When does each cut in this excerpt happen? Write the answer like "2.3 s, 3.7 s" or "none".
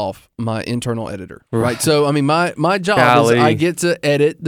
1.5 s